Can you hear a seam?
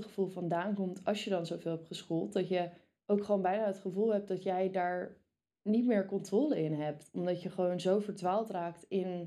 no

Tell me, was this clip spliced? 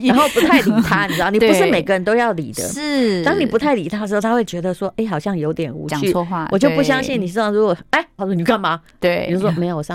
yes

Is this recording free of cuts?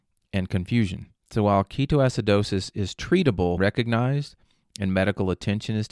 no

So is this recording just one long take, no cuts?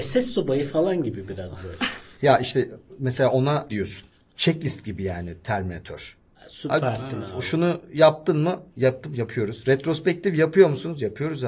no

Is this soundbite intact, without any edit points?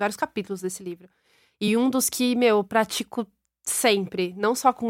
yes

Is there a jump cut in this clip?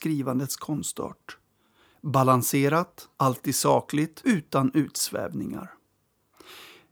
yes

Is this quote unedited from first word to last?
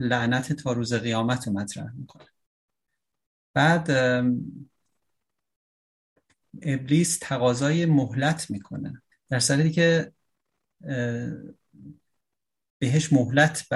no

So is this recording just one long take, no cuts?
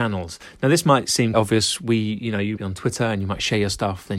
no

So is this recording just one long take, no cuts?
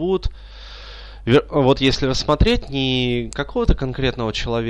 yes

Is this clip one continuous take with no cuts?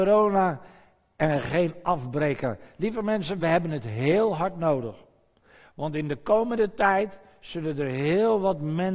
yes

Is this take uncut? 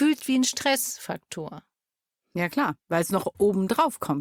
yes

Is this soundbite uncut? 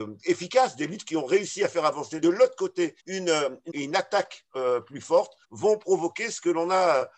no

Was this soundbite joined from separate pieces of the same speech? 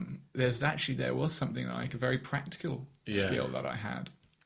yes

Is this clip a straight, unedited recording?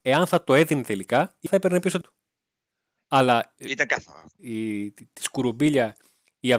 no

